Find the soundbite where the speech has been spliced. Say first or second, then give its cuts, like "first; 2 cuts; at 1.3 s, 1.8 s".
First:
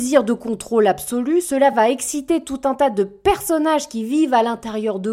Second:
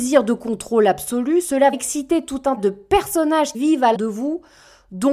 second; 4 cuts; at 1.7 s, 2.6 s, 3.5 s, 3.9 s